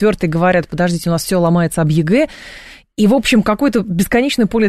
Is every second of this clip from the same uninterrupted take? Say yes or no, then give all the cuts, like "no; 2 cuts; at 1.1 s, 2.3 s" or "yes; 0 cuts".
yes; 0 cuts